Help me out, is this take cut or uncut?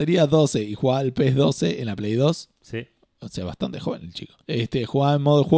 cut